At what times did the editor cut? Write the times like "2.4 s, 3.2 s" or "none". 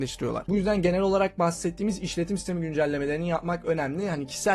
none

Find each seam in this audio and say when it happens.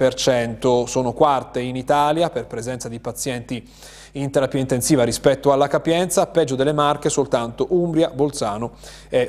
none

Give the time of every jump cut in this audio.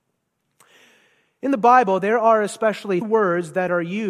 3.0 s

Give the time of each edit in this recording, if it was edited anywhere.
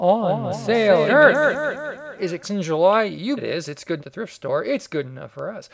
1.1 s, 2.4 s, 3.4 s, 4.0 s

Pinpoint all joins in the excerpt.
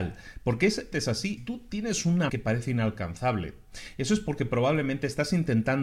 0.9 s, 1.4 s, 2.3 s

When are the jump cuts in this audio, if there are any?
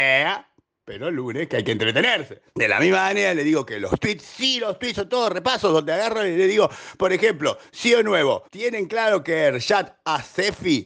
2.5 s, 8.4 s

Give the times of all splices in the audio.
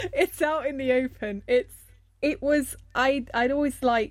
none

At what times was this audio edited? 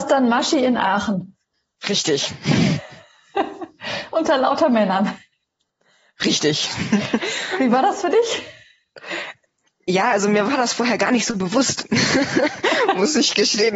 none

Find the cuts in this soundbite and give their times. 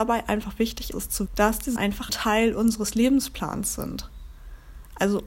0.9 s, 1.3 s, 1.8 s, 2.1 s

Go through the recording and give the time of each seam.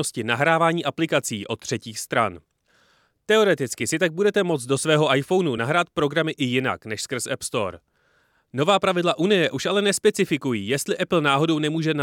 none

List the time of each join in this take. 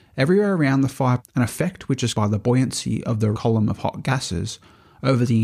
1.2 s, 2.1 s, 3.3 s

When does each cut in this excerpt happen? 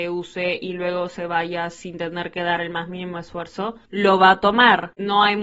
3.8 s

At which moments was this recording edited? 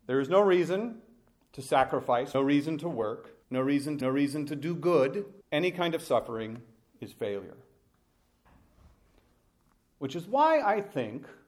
2.3 s, 3.4 s, 4.0 s, 5.4 s

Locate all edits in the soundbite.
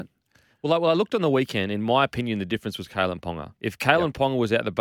3.6 s

